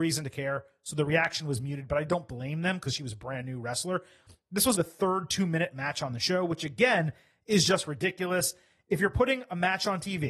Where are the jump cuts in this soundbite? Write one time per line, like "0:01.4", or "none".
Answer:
0:04.7

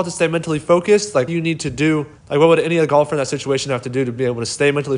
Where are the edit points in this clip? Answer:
0:01.3
0:02.2

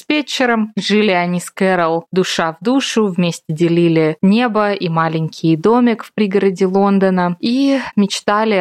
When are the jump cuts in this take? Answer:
none

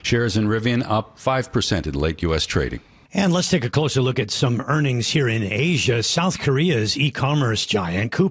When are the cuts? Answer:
none

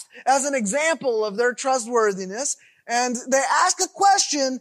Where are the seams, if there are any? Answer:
none

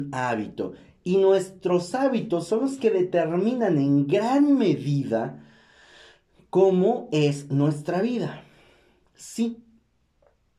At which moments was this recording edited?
none

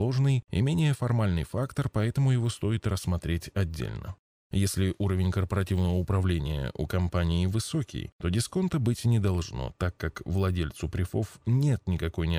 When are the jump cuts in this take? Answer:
none

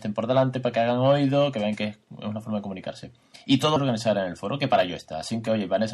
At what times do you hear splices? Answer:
0:03.8

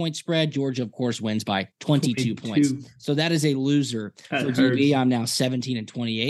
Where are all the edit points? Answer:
0:01.7

